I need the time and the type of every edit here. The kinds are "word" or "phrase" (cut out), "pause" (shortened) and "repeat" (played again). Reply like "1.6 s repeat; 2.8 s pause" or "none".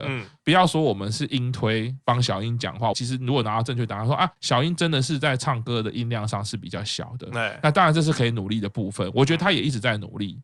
2.9 s phrase